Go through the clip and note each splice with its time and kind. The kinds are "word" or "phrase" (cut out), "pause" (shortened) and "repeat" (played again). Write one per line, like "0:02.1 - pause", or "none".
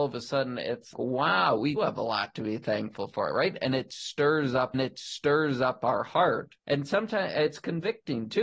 0:00.9 - word
0:01.8 - word
0:04.7 - repeat
0:06.6 - pause